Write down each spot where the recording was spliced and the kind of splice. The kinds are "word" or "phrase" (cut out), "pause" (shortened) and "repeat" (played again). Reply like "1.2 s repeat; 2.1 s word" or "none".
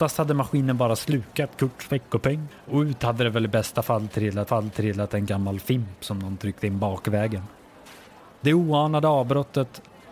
4.5 s repeat; 8.1 s pause